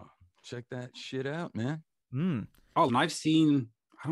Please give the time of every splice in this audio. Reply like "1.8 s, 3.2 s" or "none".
2.9 s